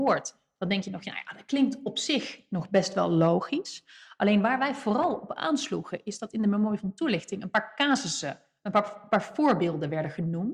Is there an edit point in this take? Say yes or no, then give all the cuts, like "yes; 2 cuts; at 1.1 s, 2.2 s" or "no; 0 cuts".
no; 0 cuts